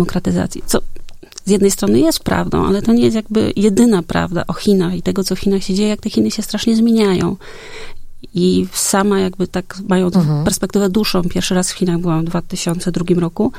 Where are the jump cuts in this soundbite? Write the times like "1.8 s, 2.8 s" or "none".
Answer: none